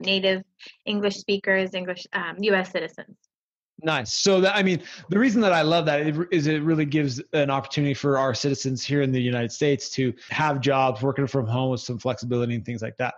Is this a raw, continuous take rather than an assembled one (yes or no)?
yes